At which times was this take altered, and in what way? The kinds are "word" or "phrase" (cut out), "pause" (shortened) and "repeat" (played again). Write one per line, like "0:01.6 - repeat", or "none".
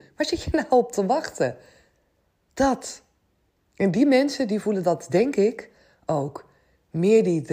none

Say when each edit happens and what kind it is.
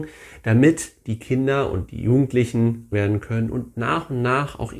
0:02.9 - word

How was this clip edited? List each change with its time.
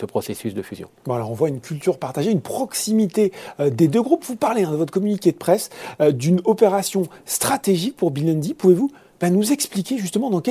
none

